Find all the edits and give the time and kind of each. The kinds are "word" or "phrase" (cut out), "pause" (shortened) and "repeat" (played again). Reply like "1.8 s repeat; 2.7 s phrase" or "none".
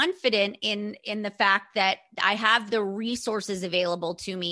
none